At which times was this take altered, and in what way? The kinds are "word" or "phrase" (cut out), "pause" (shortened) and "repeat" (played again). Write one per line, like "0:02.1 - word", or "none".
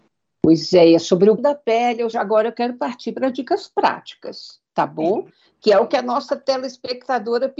0:01.4 - word
0:02.1 - word